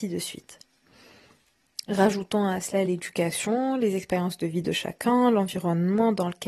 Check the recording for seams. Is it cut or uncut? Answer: uncut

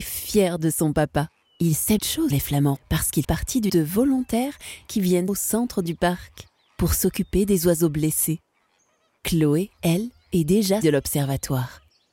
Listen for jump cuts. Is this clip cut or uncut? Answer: cut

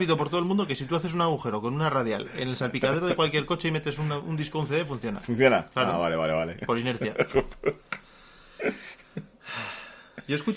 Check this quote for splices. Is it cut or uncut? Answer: uncut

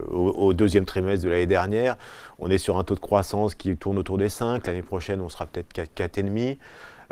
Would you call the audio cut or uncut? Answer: uncut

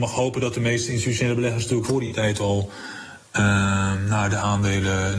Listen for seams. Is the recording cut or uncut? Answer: cut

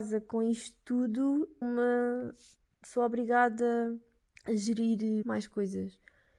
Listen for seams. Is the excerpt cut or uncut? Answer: cut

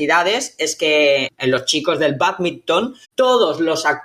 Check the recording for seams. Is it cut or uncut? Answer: cut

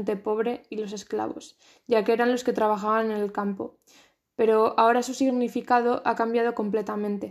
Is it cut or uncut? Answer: uncut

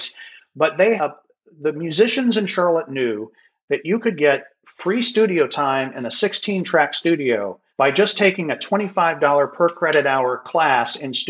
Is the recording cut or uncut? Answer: cut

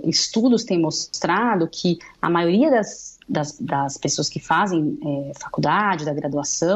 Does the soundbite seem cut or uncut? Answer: cut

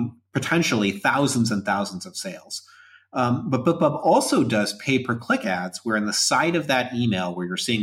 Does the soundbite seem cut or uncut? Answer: uncut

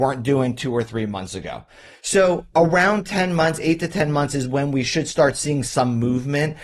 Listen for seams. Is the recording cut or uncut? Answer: uncut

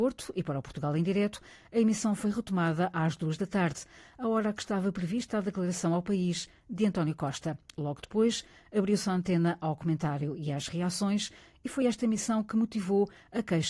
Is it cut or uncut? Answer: uncut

